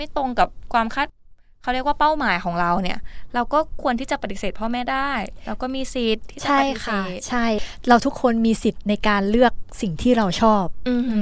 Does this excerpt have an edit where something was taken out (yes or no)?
no